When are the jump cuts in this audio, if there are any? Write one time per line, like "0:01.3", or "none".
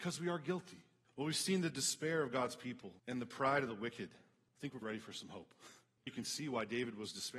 0:03.0
0:04.8
0:06.1